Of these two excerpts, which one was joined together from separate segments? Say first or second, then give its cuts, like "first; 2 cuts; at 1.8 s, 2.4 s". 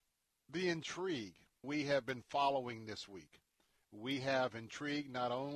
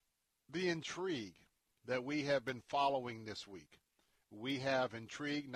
first; 1 cut; at 1.6 s